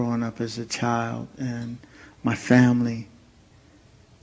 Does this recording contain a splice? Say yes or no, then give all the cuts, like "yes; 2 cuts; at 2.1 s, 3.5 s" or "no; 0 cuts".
no; 0 cuts